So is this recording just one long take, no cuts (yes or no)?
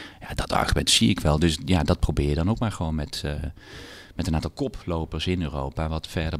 yes